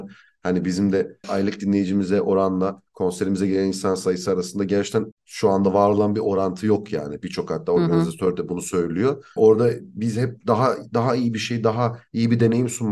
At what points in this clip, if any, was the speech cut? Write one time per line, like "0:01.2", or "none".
none